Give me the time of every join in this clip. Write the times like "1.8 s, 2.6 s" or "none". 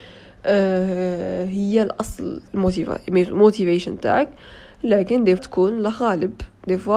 2.5 s, 5.4 s